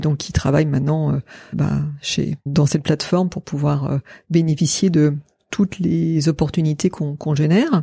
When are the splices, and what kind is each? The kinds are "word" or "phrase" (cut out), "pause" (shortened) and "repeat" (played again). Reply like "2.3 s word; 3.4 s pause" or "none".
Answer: 1.5 s word; 2.5 s word